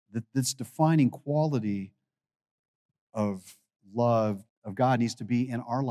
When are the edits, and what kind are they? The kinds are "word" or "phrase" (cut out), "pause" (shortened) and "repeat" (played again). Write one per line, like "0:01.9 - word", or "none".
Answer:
0:04.5 - word